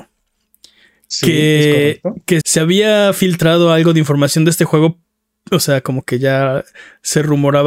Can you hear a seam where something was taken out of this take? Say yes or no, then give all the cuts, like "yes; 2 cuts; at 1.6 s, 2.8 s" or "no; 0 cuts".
yes; 1 cut; at 2.4 s